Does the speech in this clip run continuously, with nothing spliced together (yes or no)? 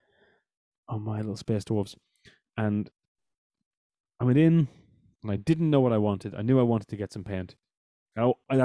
yes